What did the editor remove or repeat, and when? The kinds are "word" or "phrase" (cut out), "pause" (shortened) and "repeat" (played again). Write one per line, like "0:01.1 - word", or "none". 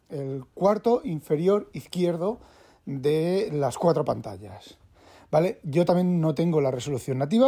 none